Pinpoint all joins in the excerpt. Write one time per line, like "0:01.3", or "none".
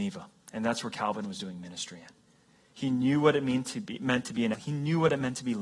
0:04.5